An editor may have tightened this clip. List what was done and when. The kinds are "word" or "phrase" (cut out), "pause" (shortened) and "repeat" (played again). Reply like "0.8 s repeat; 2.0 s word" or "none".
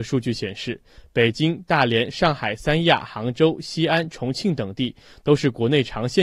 none